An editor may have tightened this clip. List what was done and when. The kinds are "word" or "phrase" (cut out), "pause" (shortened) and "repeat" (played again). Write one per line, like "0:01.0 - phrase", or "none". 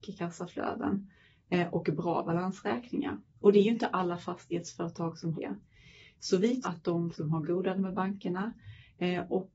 0:05.3 - word
0:06.6 - word
0:07.1 - word
0:07.8 - word

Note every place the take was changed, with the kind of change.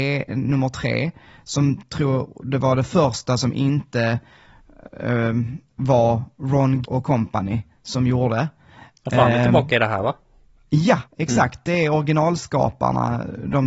0:06.8 - word
0:11.1 - pause

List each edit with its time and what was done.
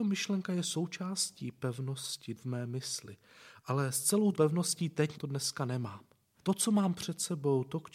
0:02.4 - word
0:04.3 - word
0:05.1 - phrase

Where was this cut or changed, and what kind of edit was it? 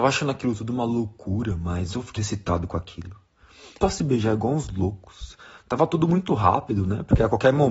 0:02.2 - word
0:03.8 - phrase

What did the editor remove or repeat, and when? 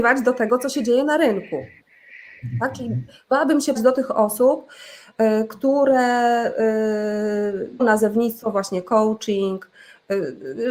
0:03.8 - word
0:07.8 - word

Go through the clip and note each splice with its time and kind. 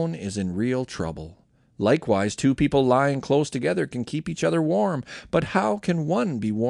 none

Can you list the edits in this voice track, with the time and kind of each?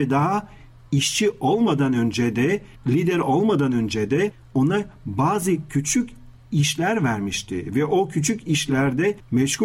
0:04.5 - pause

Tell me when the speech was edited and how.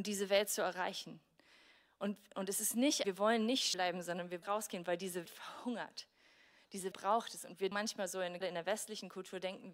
0:03.0 - word
0:03.7 - word
0:04.4 - word
0:05.3 - word
0:06.9 - word
0:07.7 - word
0:08.4 - word

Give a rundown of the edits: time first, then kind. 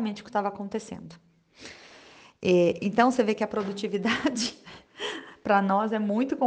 none

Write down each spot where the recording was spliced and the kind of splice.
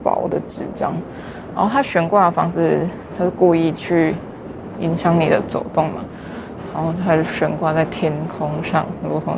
0:04.8 - word

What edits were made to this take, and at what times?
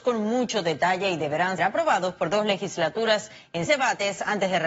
0:01.6 - word
0:03.7 - word

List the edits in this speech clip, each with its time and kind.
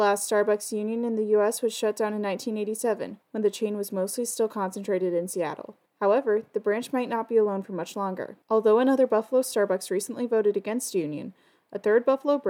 0:03.2 - pause
0:05.9 - pause
0:08.4 - pause

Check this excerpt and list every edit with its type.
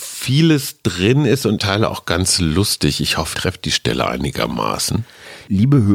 0:01.6 - phrase
0:03.3 - word

